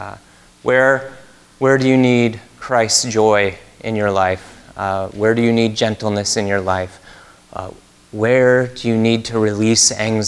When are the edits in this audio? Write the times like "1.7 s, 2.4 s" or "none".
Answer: none